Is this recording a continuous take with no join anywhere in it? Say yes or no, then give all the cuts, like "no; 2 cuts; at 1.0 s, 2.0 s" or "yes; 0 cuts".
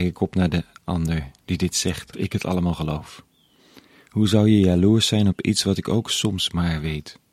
no; 1 cut; at 2.1 s